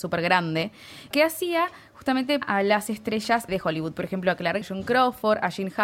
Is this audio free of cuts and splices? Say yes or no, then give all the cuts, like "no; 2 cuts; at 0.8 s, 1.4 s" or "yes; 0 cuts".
no; 4 cuts; at 1.1 s, 2.4 s, 3.5 s, 4.6 s